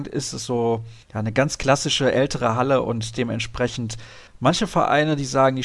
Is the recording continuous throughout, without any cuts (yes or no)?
no